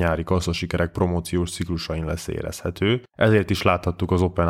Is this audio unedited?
no; 1 cut; at 3.1 s

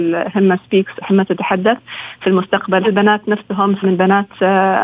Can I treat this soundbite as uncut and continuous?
no; 3 cuts; at 1.0 s, 2.8 s, 3.8 s

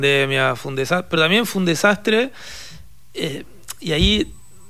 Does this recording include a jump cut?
no; 0 cuts

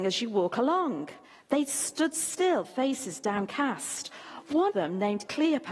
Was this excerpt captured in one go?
no; 3 cuts; at 1.2 s, 2.6 s, 4.7 s

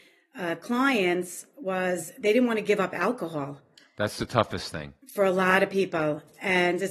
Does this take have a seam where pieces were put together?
yes; 1 cut; at 5.0 s

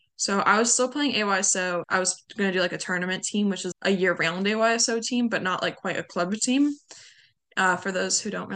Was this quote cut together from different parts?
yes; 2 cuts; at 1.8 s, 3.7 s

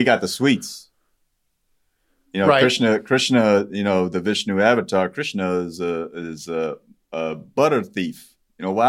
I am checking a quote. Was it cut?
no; 0 cuts

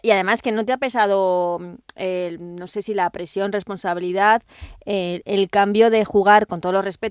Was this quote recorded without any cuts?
yes; 0 cuts

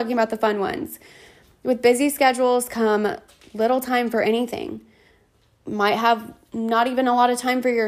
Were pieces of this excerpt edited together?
no; 0 cuts

